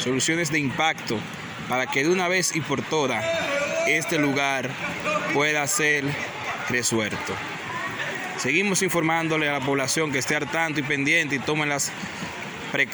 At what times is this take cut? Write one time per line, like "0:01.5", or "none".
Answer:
none